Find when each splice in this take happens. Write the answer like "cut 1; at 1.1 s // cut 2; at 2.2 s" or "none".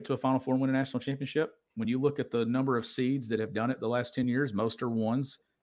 none

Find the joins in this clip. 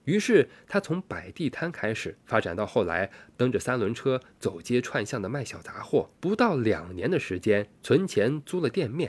cut 1; at 2.2 s // cut 2; at 6.2 s // cut 3; at 7.8 s

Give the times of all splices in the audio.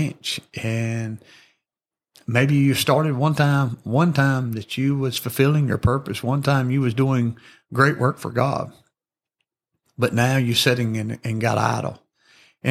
none

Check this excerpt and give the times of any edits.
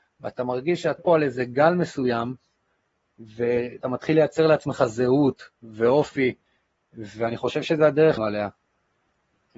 cut 1; at 1.0 s // cut 2; at 3.8 s // cut 3; at 8.2 s

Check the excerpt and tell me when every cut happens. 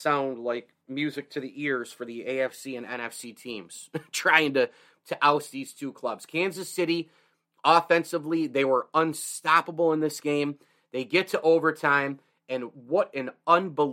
none

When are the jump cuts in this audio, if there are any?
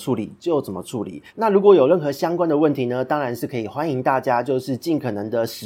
cut 1; at 1.3 s

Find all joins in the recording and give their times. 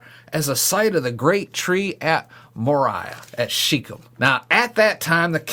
cut 1; at 3.3 s // cut 2; at 4.1 s

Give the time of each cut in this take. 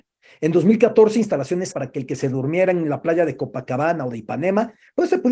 cut 1; at 1.7 s

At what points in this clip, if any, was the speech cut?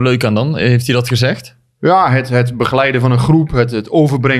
none

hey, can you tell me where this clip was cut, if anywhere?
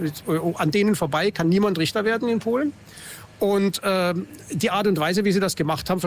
none

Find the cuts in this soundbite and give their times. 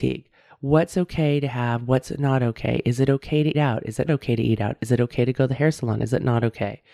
cut 1; at 3.5 s // cut 2; at 4.1 s

